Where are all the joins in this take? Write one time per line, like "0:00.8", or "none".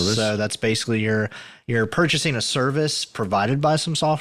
none